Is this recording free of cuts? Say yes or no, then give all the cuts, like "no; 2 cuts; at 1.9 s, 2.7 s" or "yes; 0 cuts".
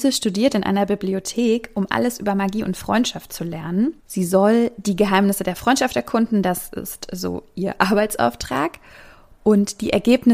no; 1 cut; at 4.0 s